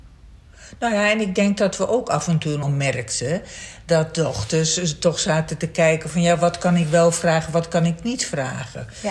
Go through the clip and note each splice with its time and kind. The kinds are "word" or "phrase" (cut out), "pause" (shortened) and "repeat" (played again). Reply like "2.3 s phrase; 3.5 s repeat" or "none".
2.6 s phrase

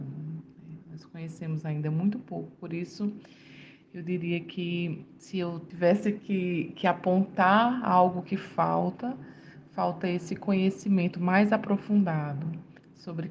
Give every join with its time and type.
none

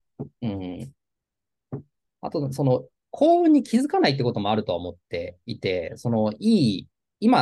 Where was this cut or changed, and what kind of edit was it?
none

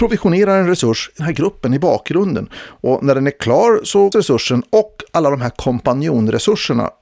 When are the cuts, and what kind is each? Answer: 1.2 s phrase; 4.1 s word

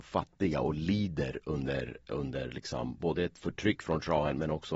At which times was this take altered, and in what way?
none

